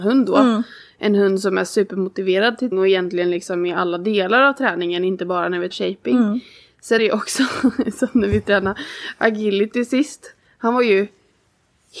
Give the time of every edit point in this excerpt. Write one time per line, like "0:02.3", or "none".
0:02.7
0:05.7
0:07.0